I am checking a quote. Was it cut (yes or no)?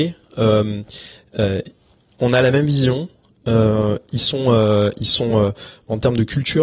no